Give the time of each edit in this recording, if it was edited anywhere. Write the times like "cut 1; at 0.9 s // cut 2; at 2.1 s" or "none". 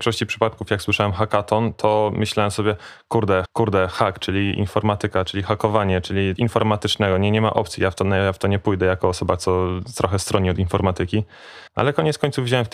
cut 1; at 3.5 s // cut 2; at 6.4 s // cut 3; at 11.7 s